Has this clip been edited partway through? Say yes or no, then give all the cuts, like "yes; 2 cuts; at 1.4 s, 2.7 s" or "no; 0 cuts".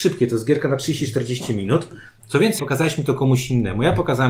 yes; 1 cut; at 2.6 s